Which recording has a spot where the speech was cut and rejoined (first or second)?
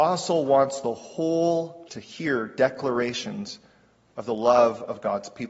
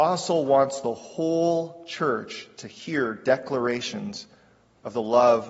first